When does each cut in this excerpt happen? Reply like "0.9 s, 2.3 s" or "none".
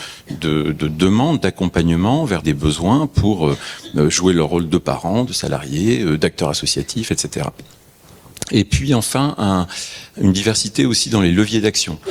2.4 s

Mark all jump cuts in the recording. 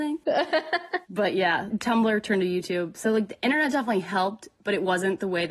1.0 s

